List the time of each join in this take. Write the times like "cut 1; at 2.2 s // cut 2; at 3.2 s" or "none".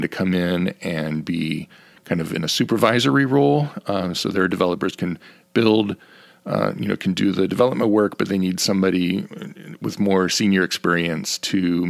none